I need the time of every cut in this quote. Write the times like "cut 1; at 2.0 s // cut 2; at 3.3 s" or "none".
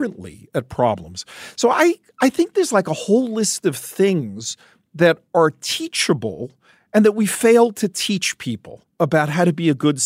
none